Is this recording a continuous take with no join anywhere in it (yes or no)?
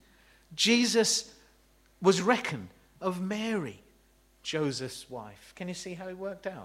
no